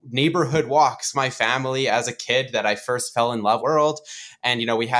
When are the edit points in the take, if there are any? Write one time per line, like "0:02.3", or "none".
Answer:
0:01.1
0:03.6